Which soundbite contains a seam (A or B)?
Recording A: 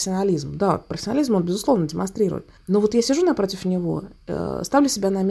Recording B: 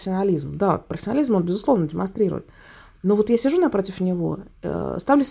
A